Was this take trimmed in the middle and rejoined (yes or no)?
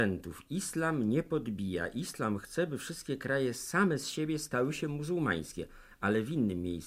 no